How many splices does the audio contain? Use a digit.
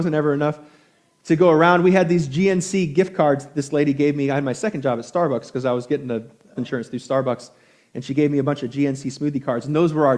1